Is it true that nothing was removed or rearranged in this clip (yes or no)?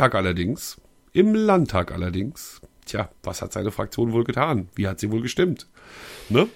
no